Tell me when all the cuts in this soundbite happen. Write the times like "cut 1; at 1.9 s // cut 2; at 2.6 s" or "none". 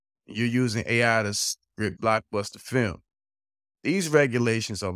cut 1; at 2.0 s

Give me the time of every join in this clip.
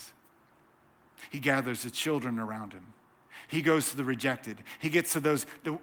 none

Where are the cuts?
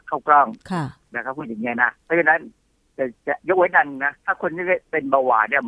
cut 1; at 2.0 s // cut 2; at 4.2 s

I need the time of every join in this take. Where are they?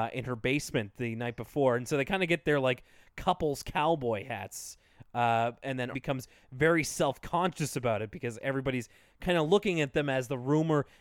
cut 1; at 5.9 s

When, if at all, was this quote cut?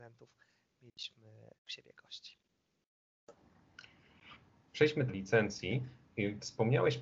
cut 1; at 1.6 s // cut 2; at 5.1 s

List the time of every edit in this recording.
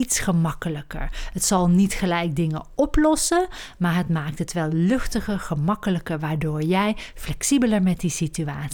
none

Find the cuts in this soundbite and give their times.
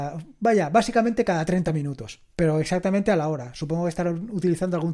none

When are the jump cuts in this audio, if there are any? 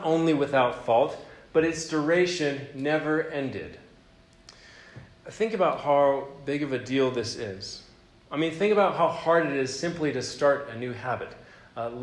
none

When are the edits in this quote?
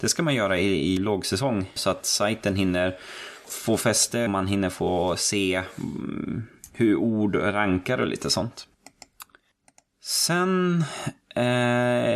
cut 1; at 1.0 s // cut 2; at 1.8 s // cut 3; at 3.5 s // cut 4; at 4.3 s

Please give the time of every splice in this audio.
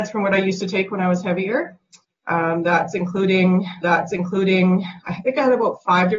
cut 1; at 3.8 s

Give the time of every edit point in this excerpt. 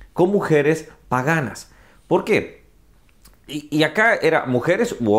none

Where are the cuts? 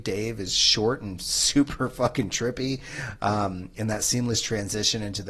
none

